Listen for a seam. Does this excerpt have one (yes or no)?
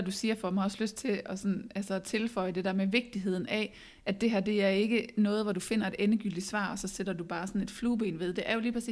no